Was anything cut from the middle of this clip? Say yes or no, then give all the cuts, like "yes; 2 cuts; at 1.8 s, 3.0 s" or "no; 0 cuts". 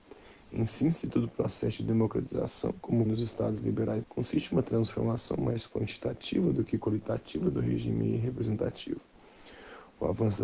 yes; 2 cuts; at 3.1 s, 4.0 s